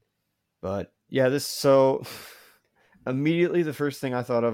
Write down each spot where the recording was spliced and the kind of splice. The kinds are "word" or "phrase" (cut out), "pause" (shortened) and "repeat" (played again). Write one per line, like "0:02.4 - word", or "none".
none